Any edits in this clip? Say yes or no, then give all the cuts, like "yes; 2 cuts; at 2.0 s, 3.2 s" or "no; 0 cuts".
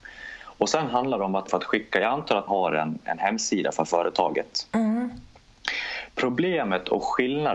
yes; 2 cuts; at 1.5 s, 2.5 s